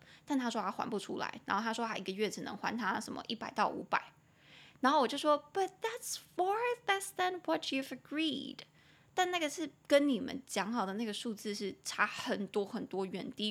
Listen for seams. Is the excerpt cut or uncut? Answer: uncut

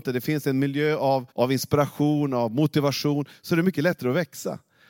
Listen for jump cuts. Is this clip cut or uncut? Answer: cut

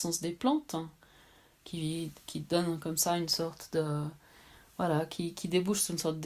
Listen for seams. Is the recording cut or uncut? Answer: uncut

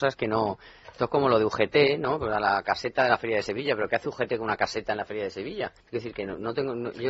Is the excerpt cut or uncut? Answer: cut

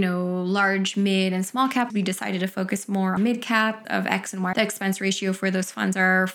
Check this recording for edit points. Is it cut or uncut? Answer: cut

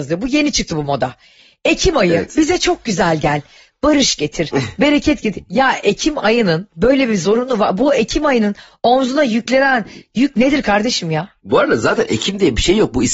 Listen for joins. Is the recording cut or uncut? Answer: uncut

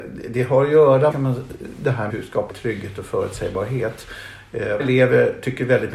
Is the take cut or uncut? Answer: cut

